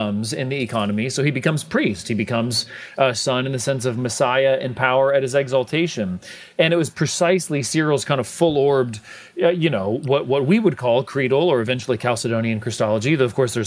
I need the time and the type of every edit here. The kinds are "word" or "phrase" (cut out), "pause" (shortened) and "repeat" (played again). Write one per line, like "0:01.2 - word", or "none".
none

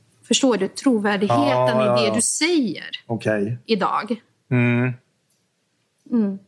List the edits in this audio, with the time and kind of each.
none

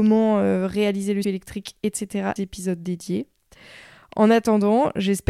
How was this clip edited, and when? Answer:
0:01.2 - word
0:02.4 - phrase

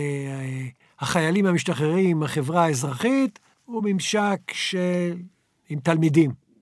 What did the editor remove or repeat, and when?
none

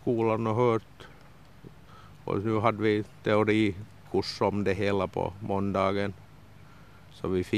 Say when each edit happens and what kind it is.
none

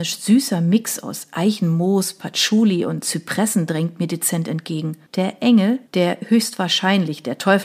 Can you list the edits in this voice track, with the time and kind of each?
0:05.1 - pause
0:05.9 - pause

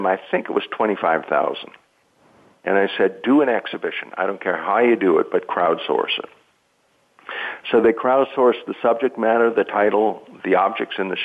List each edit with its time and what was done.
none

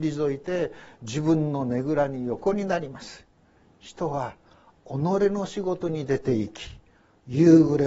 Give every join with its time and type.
none

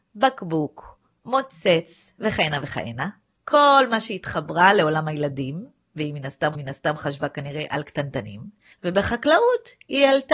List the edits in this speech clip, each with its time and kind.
0:06.5 - repeat
0:08.7 - pause

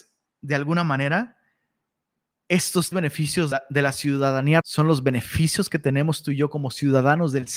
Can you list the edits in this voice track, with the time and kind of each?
0:02.9 - word
0:03.5 - word
0:04.6 - word

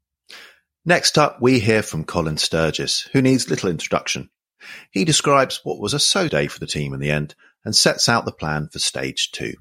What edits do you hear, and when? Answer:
0:06.3 - word

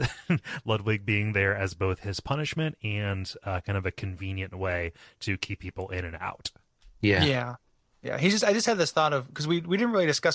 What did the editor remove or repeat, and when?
none

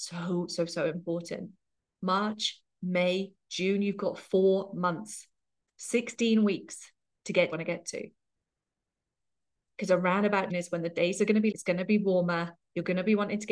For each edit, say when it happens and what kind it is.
0:02.8 - word
0:07.5 - phrase
0:10.5 - word
0:11.5 - word

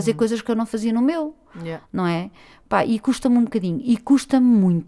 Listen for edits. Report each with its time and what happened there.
none

